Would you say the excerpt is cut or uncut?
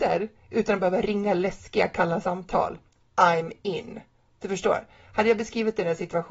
uncut